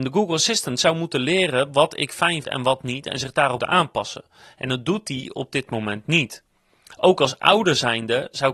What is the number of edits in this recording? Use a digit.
2